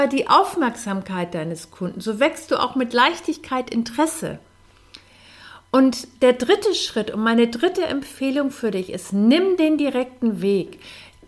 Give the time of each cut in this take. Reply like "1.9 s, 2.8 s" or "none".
6.2 s